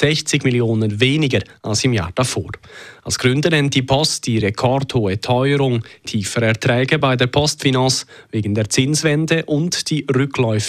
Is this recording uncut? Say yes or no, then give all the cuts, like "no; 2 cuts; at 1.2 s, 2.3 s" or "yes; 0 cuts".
yes; 0 cuts